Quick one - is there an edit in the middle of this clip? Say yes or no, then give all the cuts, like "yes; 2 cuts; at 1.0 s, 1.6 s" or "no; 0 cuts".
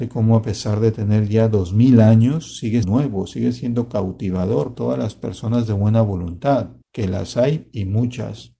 yes; 3 cuts; at 2.8 s, 4.7 s, 6.8 s